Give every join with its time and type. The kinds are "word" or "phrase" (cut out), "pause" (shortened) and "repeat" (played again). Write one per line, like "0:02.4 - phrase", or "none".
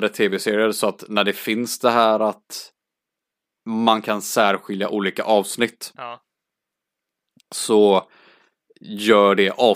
none